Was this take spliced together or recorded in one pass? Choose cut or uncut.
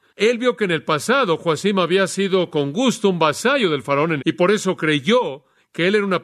cut